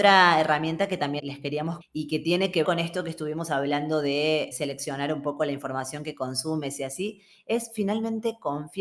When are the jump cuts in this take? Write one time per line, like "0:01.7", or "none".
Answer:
0:01.2
0:01.8
0:02.6
0:04.5